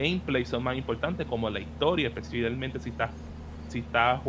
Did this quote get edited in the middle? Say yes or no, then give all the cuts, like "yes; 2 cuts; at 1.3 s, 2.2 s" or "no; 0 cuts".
no; 0 cuts